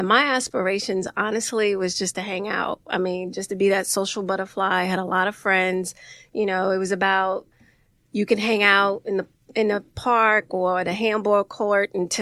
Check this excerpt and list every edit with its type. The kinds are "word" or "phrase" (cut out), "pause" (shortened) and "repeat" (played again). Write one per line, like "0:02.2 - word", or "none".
none